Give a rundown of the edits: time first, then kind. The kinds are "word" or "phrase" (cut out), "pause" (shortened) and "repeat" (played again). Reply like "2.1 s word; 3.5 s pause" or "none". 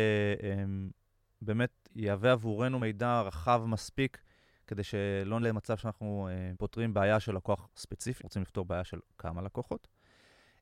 1.9 s word; 2.8 s word; 5.4 s word; 6.5 s word; 8.2 s word